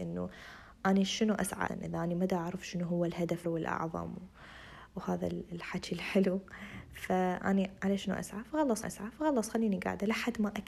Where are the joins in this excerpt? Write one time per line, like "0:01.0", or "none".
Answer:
0:01.7
0:03.4
0:08.8